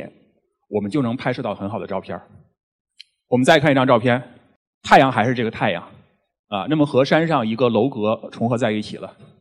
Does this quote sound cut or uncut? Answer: uncut